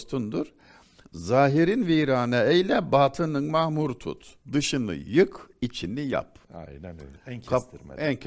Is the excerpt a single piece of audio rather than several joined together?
no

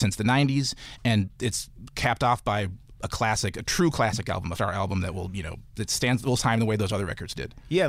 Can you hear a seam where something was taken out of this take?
yes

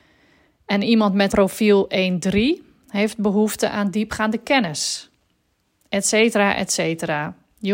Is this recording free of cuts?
no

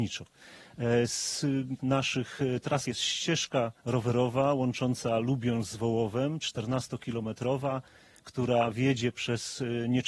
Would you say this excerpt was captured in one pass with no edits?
no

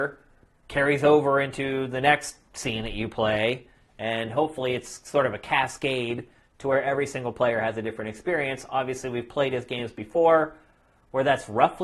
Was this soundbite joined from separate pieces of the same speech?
no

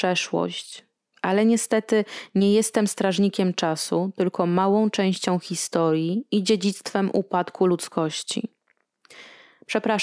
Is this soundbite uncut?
yes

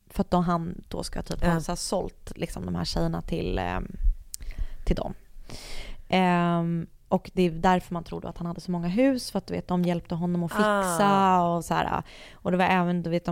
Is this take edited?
no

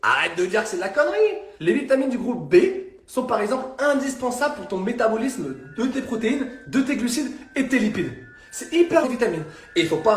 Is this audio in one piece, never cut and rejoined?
no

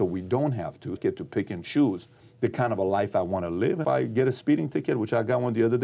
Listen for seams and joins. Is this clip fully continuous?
no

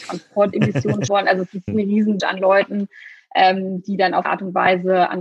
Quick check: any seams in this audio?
yes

